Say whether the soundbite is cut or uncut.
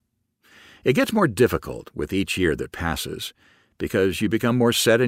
uncut